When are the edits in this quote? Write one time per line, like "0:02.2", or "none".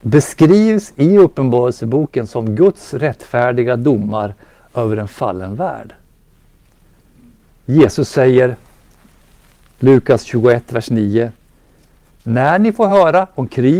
none